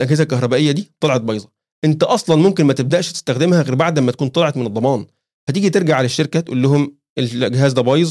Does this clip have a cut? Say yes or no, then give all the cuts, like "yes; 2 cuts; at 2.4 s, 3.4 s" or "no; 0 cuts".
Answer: no; 0 cuts